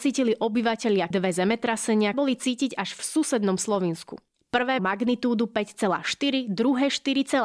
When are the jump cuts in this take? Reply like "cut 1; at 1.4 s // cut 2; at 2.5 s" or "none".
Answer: cut 1; at 1.1 s // cut 2; at 2.1 s // cut 3; at 4.8 s